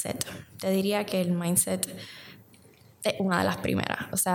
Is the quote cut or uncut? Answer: uncut